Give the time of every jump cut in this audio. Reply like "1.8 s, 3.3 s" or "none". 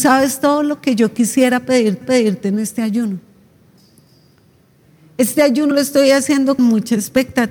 2.0 s, 5.7 s, 6.6 s